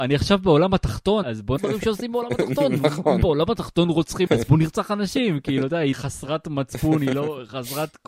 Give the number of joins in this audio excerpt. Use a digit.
4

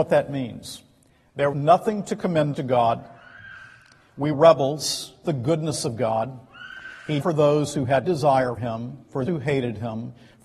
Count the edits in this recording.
8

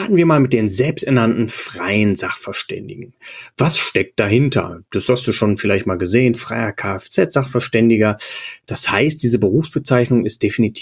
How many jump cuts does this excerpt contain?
0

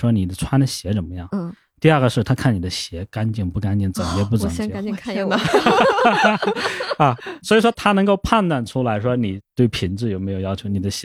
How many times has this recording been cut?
0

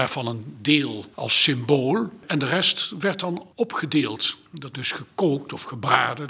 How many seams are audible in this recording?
1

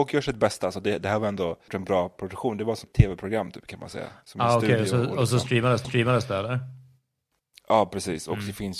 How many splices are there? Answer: 3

